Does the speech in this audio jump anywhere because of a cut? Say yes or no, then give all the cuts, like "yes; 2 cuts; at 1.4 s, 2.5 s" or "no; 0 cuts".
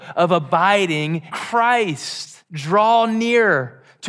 yes; 2 cuts; at 1.3 s, 2.4 s